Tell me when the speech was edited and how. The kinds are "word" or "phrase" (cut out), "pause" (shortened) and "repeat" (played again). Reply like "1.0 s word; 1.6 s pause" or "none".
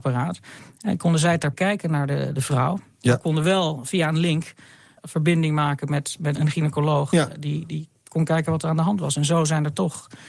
1.5 s word; 2.3 s word; 5.0 s word; 6.4 s word